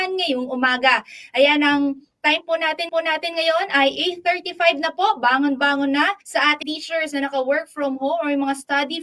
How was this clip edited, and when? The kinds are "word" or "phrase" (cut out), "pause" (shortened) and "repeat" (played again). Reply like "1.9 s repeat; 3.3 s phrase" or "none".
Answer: 2.9 s repeat; 6.2 s pause; 6.6 s phrase